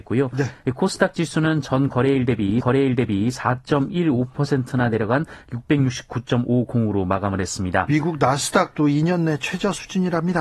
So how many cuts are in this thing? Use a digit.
1